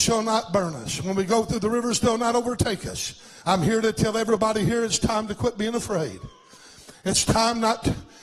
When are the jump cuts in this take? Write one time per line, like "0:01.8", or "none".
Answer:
0:03.4